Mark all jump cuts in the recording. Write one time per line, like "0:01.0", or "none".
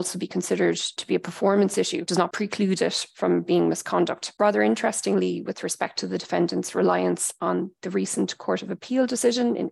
none